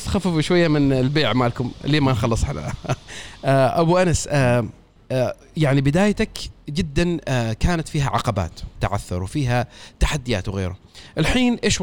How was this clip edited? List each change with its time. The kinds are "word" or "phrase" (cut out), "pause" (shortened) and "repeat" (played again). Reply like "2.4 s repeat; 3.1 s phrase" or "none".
5.0 s pause; 8.8 s word